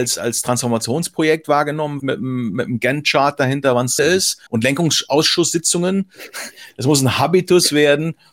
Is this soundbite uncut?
no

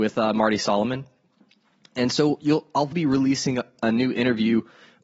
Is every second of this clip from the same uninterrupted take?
no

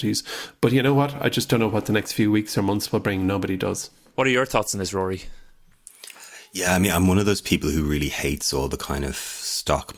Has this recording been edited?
no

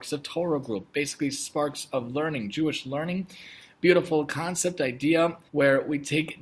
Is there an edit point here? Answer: yes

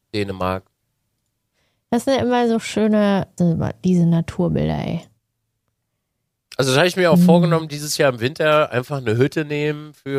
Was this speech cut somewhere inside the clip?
yes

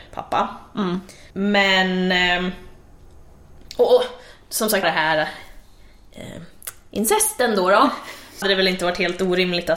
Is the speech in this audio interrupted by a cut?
yes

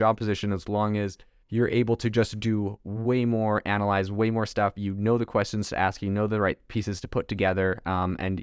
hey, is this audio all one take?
no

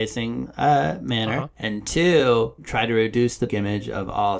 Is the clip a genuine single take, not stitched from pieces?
no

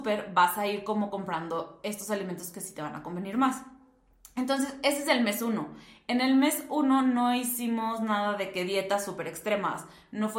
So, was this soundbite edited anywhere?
no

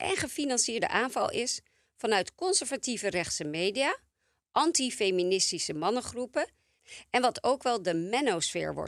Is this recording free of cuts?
yes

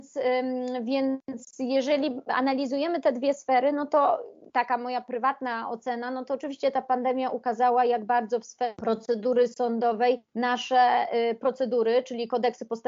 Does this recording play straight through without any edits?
no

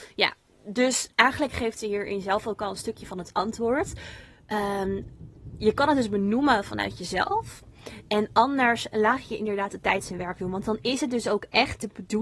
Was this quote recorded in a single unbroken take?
no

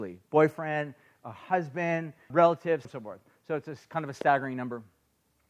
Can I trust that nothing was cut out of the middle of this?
no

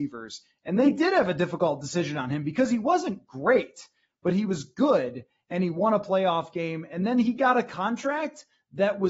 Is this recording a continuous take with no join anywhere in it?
yes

